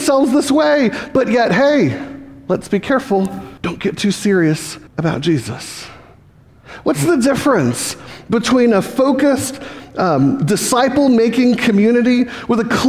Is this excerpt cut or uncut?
cut